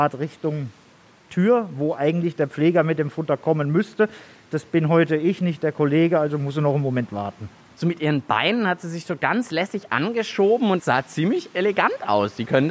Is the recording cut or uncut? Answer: uncut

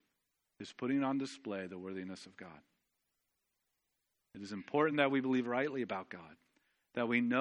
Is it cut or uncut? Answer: uncut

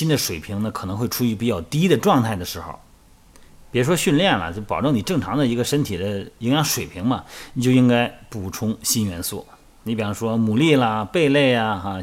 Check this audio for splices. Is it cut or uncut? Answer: uncut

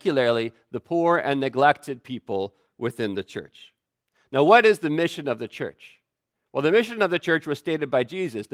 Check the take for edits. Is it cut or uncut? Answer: uncut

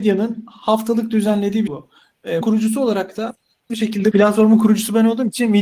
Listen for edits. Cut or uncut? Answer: cut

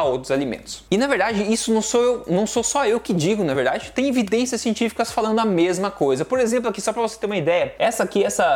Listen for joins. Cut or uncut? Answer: uncut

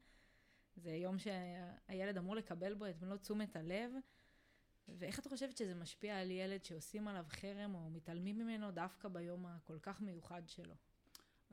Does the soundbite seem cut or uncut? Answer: uncut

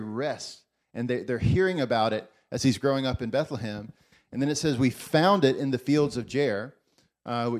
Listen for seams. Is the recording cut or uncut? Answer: uncut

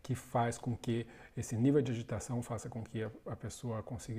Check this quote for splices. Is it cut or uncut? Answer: uncut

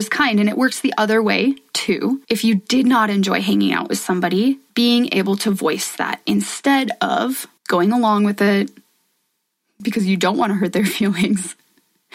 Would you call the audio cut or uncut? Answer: cut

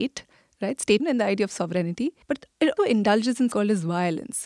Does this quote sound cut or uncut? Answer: cut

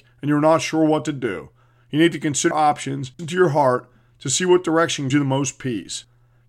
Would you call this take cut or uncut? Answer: cut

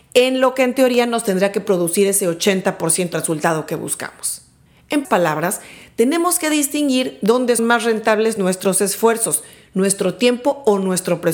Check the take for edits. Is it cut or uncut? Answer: cut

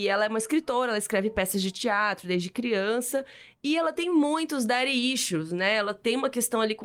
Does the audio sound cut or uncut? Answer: uncut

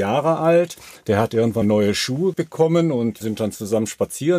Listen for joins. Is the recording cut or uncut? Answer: cut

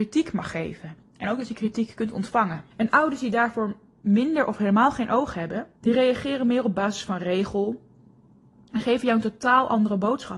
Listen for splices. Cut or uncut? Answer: cut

